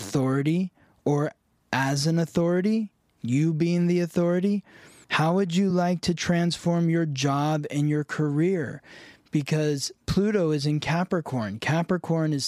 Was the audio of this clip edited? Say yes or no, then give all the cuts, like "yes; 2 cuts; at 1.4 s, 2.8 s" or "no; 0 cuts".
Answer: no; 0 cuts